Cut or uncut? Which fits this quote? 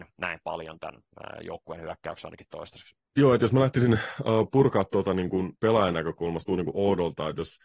cut